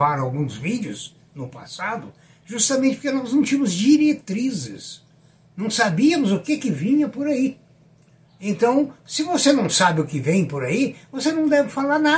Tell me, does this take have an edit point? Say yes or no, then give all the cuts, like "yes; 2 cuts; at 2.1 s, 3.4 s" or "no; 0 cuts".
no; 0 cuts